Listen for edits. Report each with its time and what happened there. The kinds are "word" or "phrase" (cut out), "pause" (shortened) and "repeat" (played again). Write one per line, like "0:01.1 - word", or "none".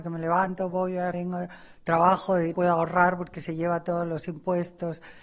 0:01.1 - word
0:02.5 - word